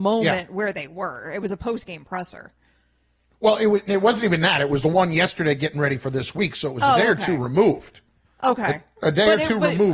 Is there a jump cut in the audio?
no; 0 cuts

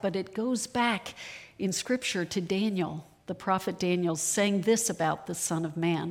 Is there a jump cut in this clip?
no; 0 cuts

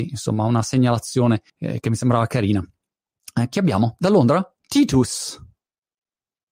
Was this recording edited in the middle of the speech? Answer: yes; 2 cuts; at 1.5 s, 4.6 s

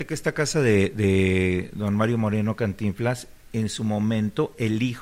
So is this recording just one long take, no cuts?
yes; 0 cuts

